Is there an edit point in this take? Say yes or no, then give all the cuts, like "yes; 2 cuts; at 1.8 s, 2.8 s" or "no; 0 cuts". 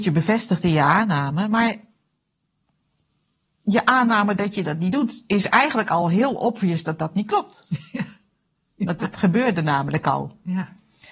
no; 0 cuts